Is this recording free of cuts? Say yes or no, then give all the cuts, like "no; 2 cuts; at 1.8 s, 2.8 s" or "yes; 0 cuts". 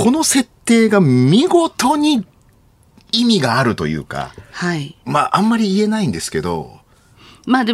yes; 0 cuts